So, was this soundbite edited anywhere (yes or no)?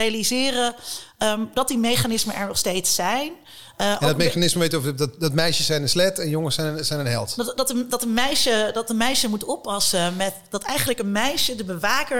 no